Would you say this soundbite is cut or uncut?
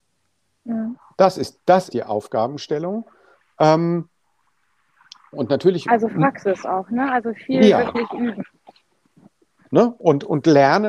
cut